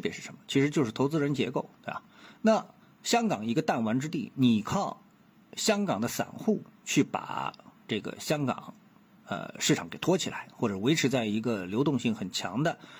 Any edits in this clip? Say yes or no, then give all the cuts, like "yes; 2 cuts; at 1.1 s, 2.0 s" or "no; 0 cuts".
no; 0 cuts